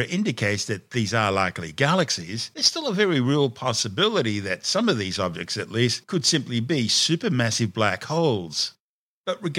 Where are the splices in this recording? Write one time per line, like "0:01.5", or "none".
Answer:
none